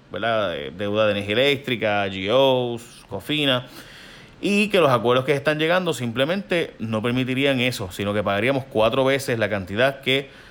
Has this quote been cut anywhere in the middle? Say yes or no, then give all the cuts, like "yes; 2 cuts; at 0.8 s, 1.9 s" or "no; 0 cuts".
no; 0 cuts